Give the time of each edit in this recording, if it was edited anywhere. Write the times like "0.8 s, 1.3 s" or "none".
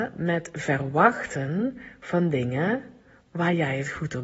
none